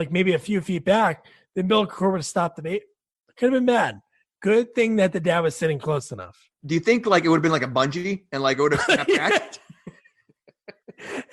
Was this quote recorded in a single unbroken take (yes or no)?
yes